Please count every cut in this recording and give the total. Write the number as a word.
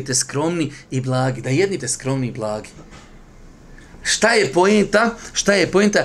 one